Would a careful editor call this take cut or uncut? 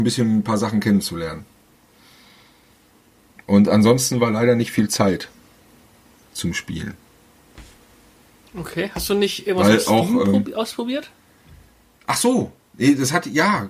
uncut